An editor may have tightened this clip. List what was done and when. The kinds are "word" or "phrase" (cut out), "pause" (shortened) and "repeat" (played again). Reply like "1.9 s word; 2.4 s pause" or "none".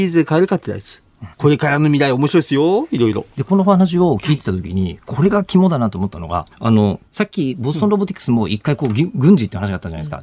1.3 s pause; 6.5 s pause; 7.1 s pause